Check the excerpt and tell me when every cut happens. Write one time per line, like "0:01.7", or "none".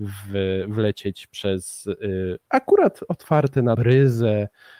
0:02.4
0:03.7